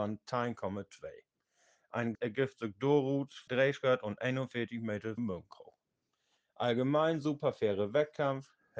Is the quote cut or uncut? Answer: cut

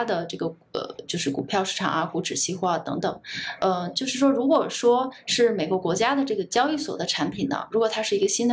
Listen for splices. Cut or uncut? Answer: uncut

